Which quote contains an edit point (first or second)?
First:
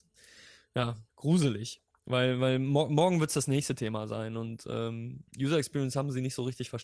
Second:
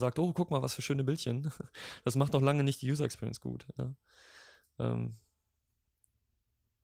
first